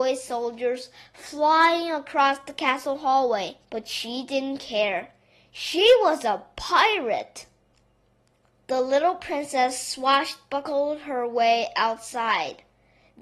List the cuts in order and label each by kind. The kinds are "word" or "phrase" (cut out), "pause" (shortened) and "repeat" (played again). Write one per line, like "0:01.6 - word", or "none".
0:03.6 - pause